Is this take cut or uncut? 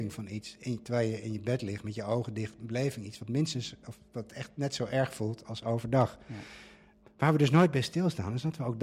uncut